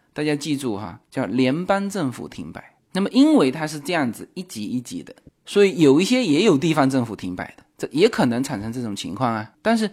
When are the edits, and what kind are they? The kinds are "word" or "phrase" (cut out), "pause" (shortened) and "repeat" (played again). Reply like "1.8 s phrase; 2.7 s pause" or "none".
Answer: none

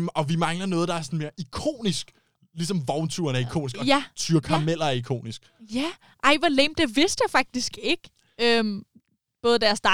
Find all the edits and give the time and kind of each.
none

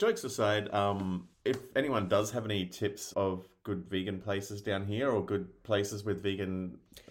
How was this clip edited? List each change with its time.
1.3 s pause; 3.1 s word

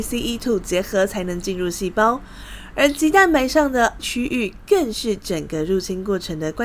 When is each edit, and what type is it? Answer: 4.0 s word

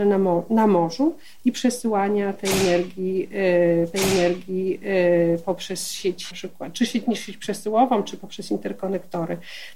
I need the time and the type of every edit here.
3.9 s repeat; 6.3 s word

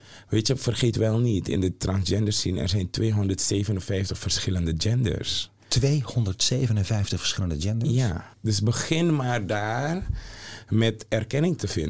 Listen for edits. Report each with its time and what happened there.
5.6 s pause; 8.3 s pause

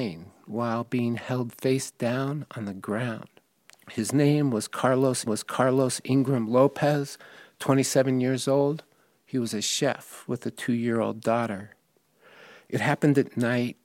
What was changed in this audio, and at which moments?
5.3 s repeat

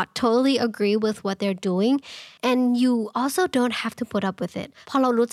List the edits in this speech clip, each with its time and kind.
2.4 s pause

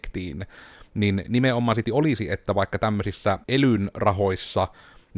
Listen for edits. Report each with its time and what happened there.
1.8 s phrase; 3.4 s pause

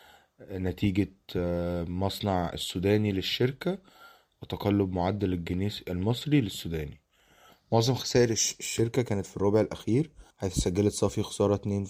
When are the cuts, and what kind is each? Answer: 10.3 s pause

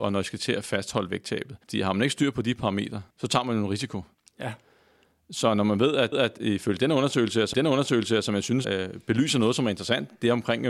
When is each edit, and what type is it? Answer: 1.6 s pause; 3.1 s pause; 4.1 s pause; 6.1 s repeat; 7.5 s repeat; 8.6 s word

